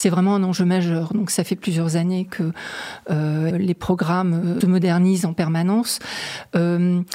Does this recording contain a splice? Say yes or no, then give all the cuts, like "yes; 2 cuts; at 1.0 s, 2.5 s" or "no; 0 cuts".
yes; 2 cuts; at 3.5 s, 4.6 s